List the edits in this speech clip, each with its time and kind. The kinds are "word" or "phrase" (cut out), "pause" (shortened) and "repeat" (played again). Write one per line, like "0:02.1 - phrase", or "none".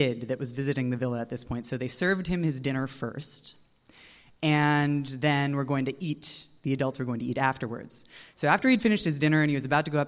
none